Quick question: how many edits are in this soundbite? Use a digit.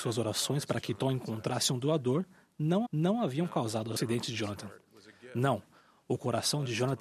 1